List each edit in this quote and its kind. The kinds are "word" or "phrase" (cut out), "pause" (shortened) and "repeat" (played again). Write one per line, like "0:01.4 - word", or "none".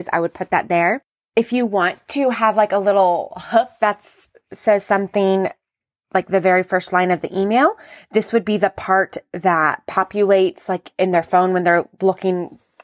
none